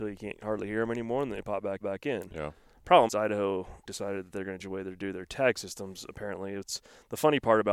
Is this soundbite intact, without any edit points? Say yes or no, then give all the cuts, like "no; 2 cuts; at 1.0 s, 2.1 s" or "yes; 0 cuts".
no; 4 cuts; at 1.8 s, 3.1 s, 3.8 s, 4.6 s